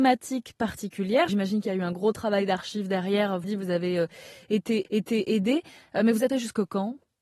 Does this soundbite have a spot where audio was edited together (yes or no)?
yes